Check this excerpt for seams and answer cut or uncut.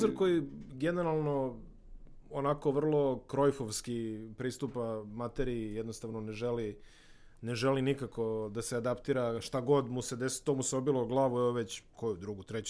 uncut